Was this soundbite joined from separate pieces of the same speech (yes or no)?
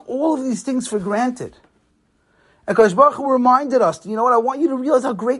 no